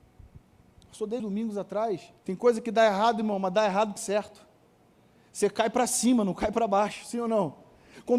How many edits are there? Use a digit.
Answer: 3